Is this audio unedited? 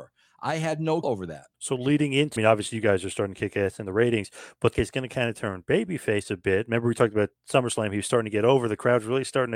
no; 4 cuts; at 1.0 s, 1.5 s, 2.4 s, 4.7 s

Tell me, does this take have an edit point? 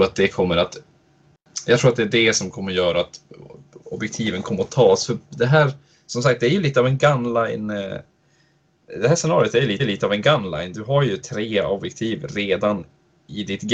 yes; 2 cuts; at 3.8 s, 9.8 s

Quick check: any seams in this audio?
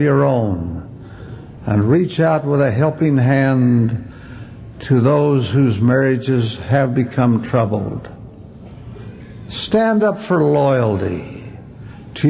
no; 0 cuts

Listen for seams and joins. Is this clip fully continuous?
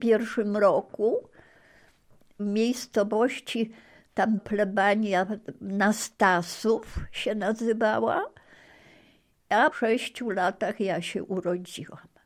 no; 3 cuts; at 2.4 s, 4.4 s, 9.7 s

